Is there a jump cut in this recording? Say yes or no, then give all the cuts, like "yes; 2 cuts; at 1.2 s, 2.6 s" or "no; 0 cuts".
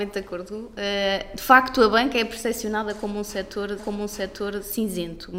yes; 1 cut; at 3.8 s